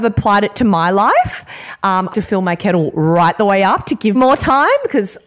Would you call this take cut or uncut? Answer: cut